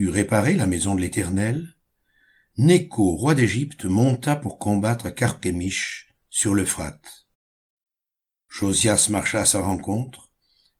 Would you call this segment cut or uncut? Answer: uncut